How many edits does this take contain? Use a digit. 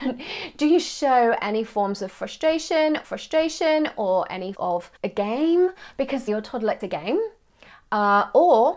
5